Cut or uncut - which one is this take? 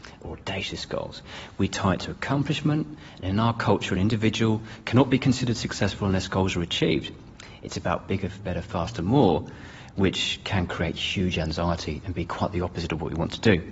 uncut